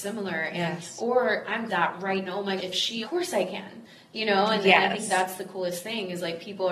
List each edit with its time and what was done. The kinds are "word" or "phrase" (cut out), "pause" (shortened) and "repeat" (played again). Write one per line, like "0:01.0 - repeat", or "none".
0:01.7 - phrase
0:02.3 - phrase
0:02.6 - word
0:03.0 - phrase